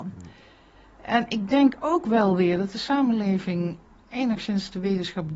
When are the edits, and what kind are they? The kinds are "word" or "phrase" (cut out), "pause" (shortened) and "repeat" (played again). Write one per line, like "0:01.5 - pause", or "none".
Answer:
none

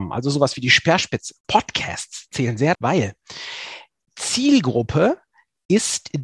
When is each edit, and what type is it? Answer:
0:02.7 - word

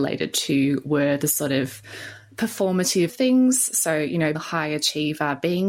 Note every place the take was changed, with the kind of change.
0:03.1 - phrase
0:04.3 - word

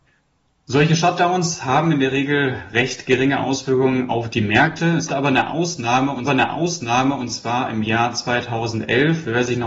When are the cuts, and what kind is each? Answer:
0:05.1 - word
0:06.3 - repeat

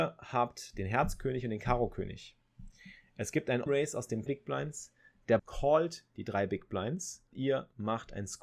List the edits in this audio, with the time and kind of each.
0:03.7 - word
0:04.3 - phrase
0:05.4 - word
0:07.3 - word

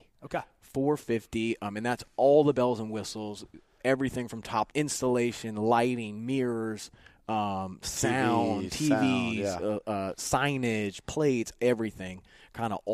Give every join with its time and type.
0:04.7 - phrase

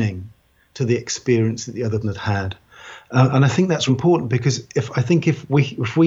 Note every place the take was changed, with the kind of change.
0:02.0 - word
0:03.9 - word

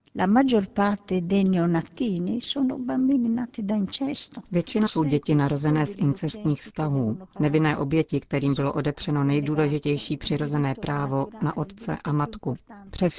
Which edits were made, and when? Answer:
0:04.9 - word

